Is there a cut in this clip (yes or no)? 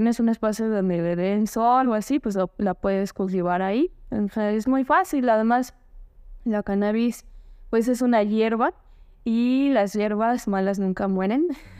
no